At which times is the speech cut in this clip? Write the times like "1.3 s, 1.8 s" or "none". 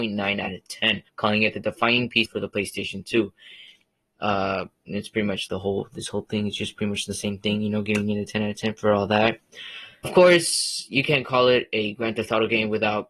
1.1 s, 2.3 s, 5.5 s, 10.0 s